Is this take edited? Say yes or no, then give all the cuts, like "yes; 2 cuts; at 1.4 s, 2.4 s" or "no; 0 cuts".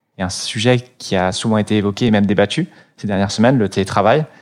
no; 0 cuts